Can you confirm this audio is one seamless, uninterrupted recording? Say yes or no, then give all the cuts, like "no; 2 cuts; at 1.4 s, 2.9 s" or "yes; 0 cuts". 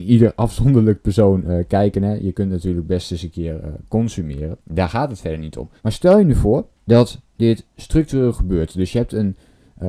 no; 3 cuts; at 4.6 s, 5.8 s, 6.8 s